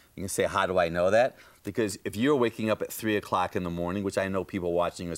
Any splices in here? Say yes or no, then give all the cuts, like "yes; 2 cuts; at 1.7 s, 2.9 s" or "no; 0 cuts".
no; 0 cuts